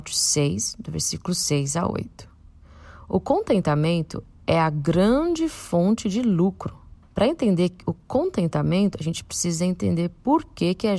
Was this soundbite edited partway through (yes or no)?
yes